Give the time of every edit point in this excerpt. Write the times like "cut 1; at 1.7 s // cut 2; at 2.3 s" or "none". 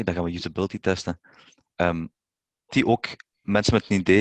cut 1; at 2.7 s